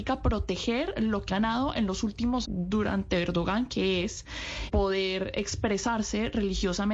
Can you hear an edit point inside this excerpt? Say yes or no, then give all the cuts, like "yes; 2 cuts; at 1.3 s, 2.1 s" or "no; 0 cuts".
yes; 3 cuts; at 1.3 s, 2.4 s, 4.7 s